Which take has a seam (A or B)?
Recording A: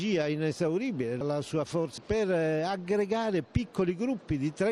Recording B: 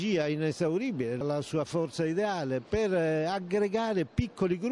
A